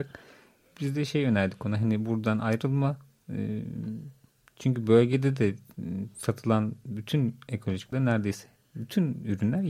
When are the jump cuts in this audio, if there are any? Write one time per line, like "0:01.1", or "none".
0:07.9